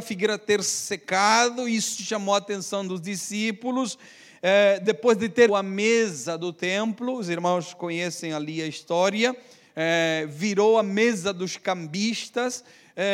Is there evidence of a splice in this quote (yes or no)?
yes